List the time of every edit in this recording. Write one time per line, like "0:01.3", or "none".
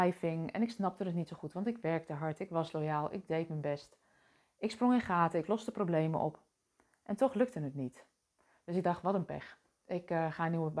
none